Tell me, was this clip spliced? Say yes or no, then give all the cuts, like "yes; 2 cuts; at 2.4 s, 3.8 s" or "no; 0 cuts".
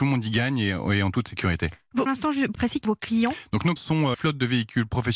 yes; 5 cuts; at 2.1 s, 2.5 s, 2.8 s, 3.8 s, 4.1 s